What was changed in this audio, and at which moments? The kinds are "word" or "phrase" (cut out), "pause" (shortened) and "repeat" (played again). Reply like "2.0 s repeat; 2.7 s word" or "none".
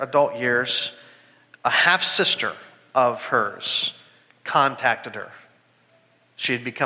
none